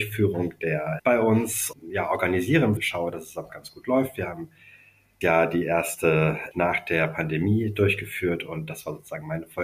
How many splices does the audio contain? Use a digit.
6